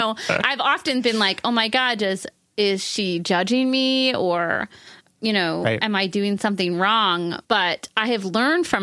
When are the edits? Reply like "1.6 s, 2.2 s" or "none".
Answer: 7.4 s